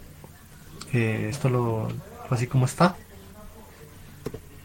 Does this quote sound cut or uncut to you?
cut